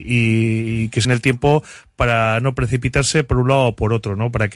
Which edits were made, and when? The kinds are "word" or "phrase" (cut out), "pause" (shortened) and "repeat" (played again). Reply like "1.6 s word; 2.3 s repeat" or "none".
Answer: 1.0 s word